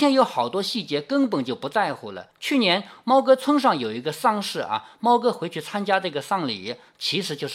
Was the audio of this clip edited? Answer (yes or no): yes